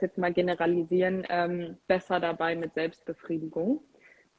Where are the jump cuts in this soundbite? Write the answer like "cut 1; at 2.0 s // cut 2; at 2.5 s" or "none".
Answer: cut 1; at 1.8 s